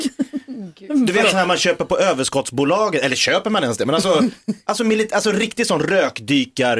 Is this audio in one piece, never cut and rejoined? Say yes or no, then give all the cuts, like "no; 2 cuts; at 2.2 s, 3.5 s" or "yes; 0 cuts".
yes; 0 cuts